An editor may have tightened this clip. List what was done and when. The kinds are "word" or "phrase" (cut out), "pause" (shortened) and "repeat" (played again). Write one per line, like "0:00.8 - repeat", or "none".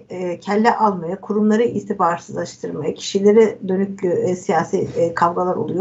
none